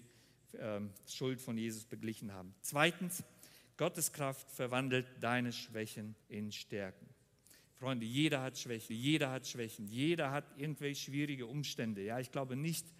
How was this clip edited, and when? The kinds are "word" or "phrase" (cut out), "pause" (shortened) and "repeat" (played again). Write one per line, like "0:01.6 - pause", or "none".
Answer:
0:06.2 - pause
0:08.9 - repeat

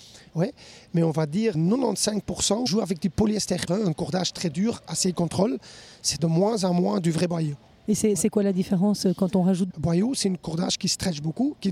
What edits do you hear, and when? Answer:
0:01.5 - word
0:03.7 - word
0:06.2 - word
0:09.7 - word

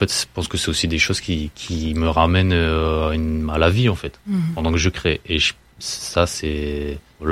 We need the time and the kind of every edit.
none

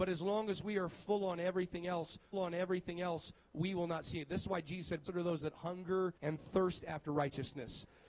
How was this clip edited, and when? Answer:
0:02.3 - repeat
0:05.1 - word
0:06.2 - pause

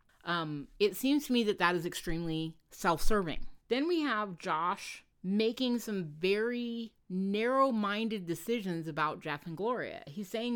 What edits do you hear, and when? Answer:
0:03.6 - pause
0:05.1 - pause

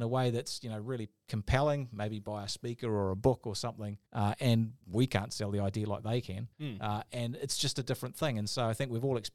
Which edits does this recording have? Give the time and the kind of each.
0:04.0 - pause
0:04.8 - pause
0:06.5 - pause

